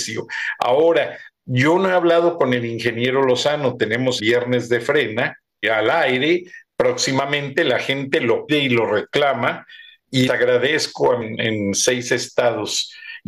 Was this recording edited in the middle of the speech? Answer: yes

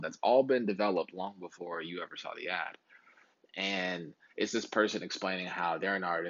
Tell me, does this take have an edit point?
no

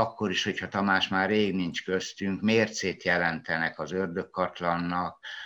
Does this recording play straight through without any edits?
yes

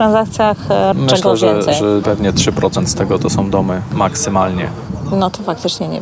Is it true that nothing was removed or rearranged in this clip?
no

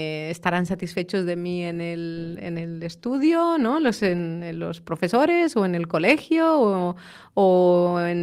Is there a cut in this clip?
no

